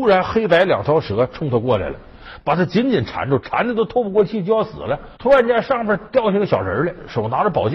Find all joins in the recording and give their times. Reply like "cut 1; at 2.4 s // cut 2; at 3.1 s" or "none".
cut 1; at 5.2 s

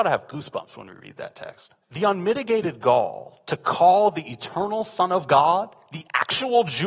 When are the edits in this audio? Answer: cut 1; at 1.8 s

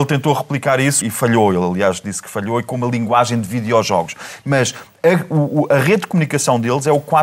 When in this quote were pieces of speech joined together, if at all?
cut 1; at 1.0 s

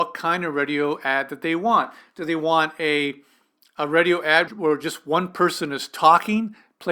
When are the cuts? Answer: cut 1; at 4.5 s

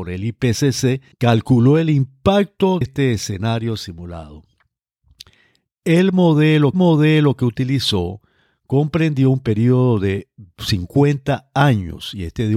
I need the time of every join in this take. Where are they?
cut 1; at 1.1 s // cut 2; at 2.8 s // cut 3; at 6.7 s

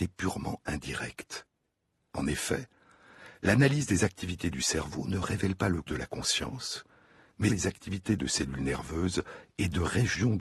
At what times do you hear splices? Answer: cut 1; at 5.9 s // cut 2; at 7.5 s // cut 3; at 8.2 s

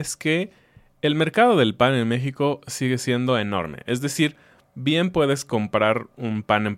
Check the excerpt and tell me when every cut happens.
none

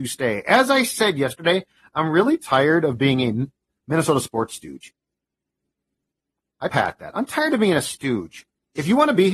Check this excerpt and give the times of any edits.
cut 1; at 6.7 s

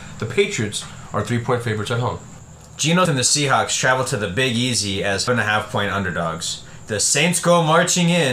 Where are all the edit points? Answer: cut 1; at 3.1 s // cut 2; at 5.3 s

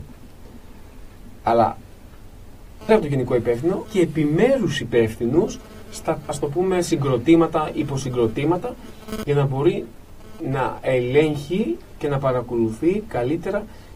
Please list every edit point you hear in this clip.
cut 1; at 2.9 s // cut 2; at 3.8 s // cut 3; at 6.3 s

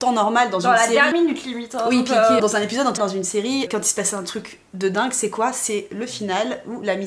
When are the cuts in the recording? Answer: cut 1; at 1.1 s // cut 2; at 2.4 s // cut 3; at 3.0 s // cut 4; at 3.7 s

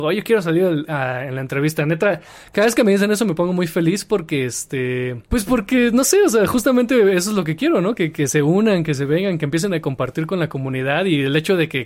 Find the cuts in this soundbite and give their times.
cut 1; at 5.3 s

